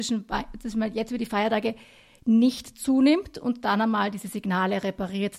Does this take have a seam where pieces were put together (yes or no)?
no